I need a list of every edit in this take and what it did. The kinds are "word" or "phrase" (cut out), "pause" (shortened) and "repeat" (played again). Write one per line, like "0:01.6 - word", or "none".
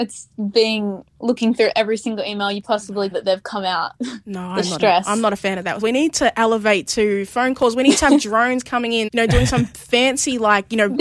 0:03.1 - phrase
0:05.8 - word
0:09.1 - word